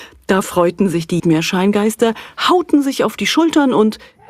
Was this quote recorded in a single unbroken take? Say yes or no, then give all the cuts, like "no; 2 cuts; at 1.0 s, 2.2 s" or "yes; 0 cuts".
no; 1 cut; at 1.2 s